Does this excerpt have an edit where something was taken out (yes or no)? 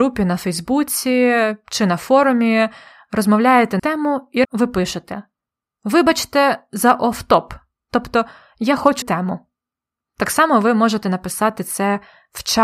yes